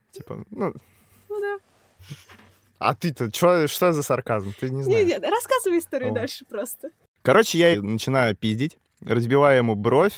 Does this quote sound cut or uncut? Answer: cut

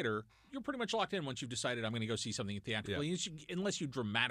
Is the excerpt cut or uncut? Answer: uncut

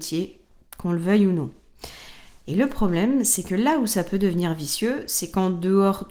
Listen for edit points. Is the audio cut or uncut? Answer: uncut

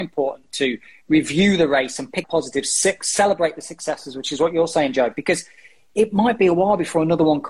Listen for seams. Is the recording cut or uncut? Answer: cut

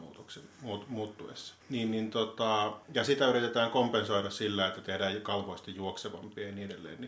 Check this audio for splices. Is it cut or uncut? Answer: cut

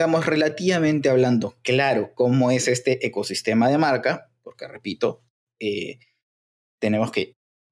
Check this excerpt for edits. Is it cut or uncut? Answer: uncut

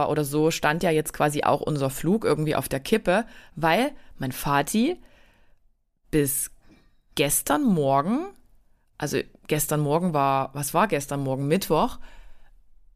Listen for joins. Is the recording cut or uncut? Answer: uncut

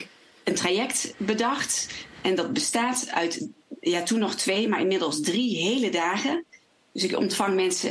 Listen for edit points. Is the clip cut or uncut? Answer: uncut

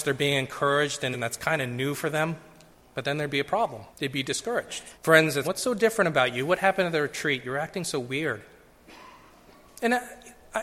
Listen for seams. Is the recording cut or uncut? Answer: cut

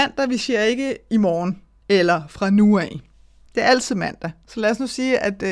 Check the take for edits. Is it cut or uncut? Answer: uncut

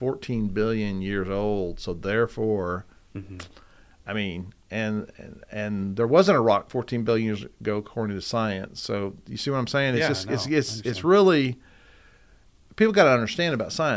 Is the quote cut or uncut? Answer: uncut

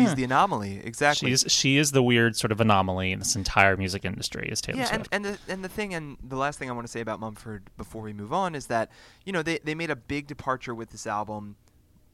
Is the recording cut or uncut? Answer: uncut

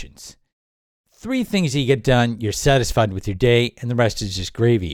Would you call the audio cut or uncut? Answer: uncut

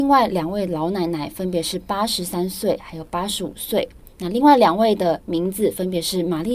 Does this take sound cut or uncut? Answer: cut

